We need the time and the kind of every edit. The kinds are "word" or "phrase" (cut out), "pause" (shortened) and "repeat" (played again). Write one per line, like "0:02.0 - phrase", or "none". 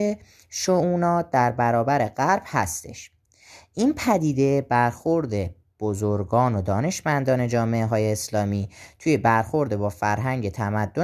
none